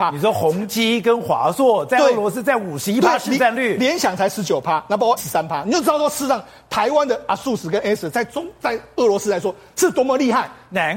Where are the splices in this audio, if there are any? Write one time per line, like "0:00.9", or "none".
0:05.2